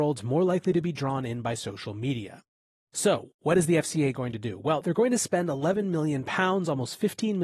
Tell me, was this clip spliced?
no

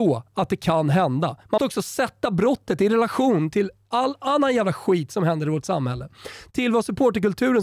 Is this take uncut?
no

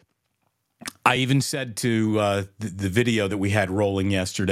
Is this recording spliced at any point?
no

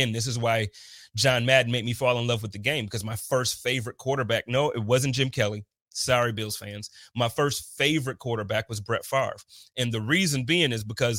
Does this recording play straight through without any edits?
yes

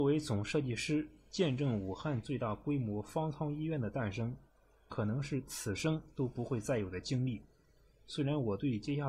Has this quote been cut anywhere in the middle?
no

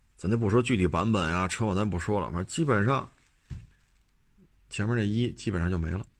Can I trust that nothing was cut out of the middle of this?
yes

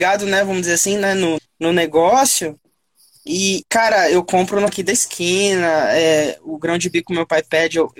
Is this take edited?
yes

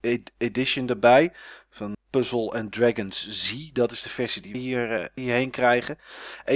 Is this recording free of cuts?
no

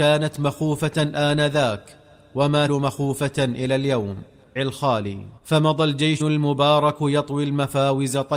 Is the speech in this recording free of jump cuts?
no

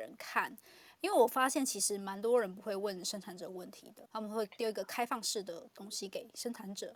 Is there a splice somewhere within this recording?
yes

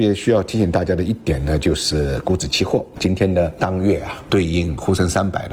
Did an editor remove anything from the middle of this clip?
yes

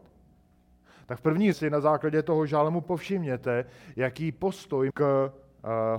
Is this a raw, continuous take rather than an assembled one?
no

